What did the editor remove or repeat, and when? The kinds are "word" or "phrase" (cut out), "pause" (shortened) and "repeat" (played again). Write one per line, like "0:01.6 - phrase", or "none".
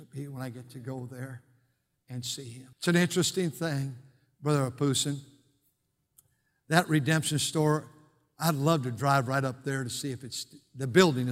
0:02.7 - pause